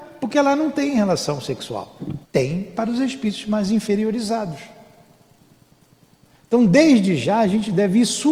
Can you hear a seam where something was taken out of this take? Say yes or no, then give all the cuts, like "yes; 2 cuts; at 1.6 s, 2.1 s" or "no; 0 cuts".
yes; 1 cut; at 2.2 s